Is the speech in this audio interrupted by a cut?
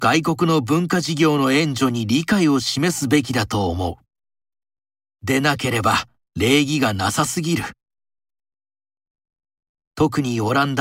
no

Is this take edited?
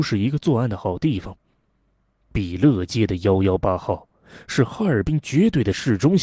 no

